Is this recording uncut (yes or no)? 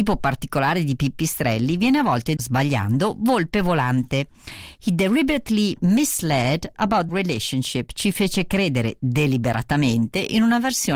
no